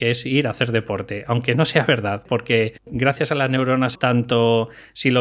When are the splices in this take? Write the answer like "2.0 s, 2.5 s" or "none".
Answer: 2.8 s, 3.9 s